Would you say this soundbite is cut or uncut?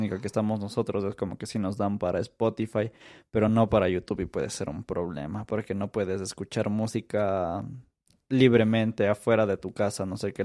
uncut